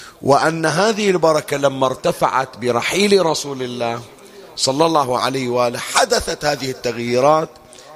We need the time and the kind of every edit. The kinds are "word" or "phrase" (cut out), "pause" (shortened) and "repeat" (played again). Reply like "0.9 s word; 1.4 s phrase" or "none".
none